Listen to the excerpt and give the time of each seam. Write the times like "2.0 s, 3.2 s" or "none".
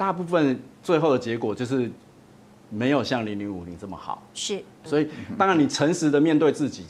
4.9 s